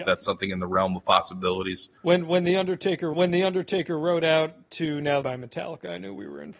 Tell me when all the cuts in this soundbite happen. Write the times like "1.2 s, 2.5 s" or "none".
2.0 s, 3.1 s, 5.2 s

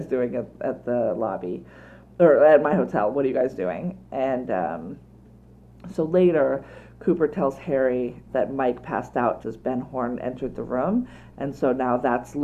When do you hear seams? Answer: 8.3 s, 9.4 s

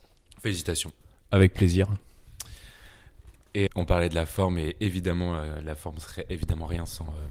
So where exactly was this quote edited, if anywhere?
3.7 s

